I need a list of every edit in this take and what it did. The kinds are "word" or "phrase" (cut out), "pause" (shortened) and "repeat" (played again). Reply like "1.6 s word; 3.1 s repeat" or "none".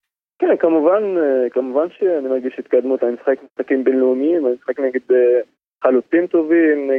none